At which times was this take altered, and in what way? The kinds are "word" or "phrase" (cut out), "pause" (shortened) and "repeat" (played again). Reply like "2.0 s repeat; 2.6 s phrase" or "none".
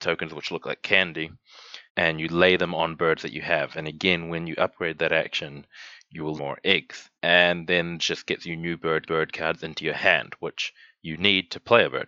1.9 s pause; 6.4 s phrase; 7.2 s pause; 8.0 s phrase; 9.1 s repeat